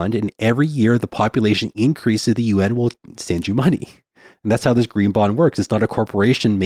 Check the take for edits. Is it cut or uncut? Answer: uncut